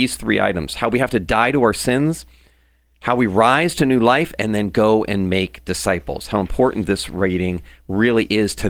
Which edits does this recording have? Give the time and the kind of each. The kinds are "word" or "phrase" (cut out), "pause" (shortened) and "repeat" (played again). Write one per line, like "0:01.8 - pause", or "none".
none